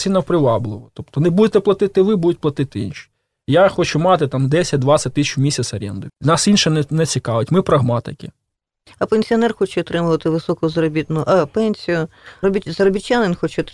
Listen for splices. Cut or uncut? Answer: cut